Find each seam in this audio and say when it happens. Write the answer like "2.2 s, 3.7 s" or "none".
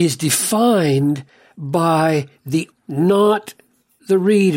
2.7 s